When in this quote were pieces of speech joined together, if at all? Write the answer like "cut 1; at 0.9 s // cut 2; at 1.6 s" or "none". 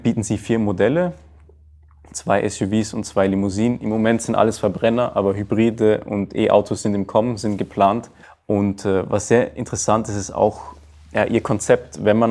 cut 1; at 8.2 s